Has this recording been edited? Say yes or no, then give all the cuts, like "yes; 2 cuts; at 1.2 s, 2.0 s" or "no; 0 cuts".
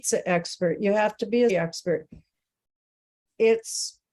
yes; 1 cut; at 1.5 s